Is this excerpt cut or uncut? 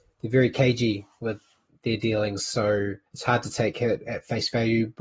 cut